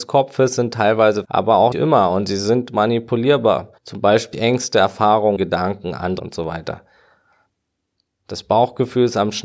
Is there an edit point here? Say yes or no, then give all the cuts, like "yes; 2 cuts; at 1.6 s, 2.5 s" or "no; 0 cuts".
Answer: yes; 6 cuts; at 1.2 s, 1.7 s, 3.8 s, 4.3 s, 5.4 s, 6.2 s